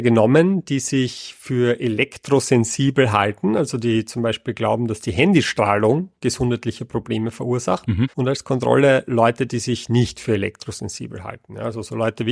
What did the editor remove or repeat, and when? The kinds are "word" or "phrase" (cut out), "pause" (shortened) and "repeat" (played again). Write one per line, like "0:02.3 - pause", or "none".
0:08.1 - pause